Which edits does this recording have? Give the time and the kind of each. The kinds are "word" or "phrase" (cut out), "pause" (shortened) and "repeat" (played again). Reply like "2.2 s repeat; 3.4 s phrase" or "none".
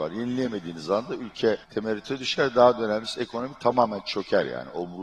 1.6 s pause